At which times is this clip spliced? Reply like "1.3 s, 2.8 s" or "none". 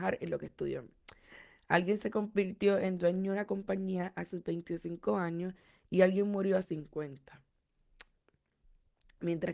6.6 s